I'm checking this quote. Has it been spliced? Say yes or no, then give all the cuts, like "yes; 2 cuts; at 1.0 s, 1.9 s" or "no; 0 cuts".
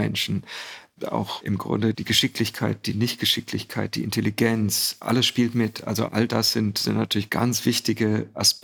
no; 0 cuts